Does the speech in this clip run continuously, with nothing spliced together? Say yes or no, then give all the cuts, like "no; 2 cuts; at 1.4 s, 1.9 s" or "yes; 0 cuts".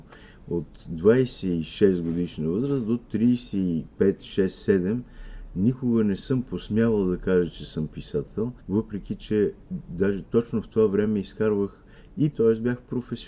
no; 3 cuts; at 3.9 s, 8.6 s, 12.3 s